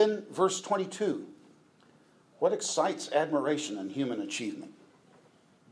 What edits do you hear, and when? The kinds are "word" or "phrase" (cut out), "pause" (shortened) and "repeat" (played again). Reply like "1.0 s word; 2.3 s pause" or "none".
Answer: none